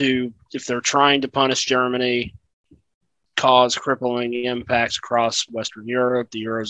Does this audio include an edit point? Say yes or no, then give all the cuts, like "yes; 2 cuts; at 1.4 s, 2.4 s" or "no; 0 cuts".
no; 0 cuts